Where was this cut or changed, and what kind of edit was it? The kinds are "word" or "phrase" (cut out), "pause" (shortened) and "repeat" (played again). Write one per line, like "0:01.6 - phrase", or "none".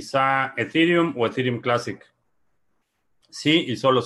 none